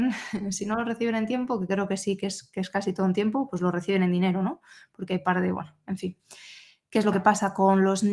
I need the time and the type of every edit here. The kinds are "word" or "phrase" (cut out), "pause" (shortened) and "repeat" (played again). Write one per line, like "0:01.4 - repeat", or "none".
none